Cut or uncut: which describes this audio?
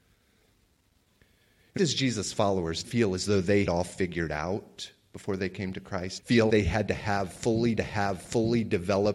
cut